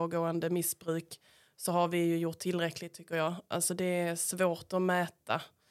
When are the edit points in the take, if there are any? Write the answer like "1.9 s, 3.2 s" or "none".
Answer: none